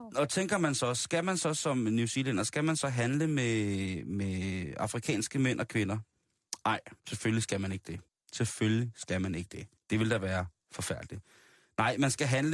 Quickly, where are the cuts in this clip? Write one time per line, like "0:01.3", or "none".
0:07.0
0:08.1
0:09.8